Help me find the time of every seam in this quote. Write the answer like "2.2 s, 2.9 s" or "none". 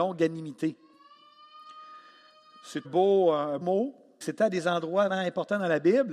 2.8 s, 3.6 s, 4.2 s, 5.1 s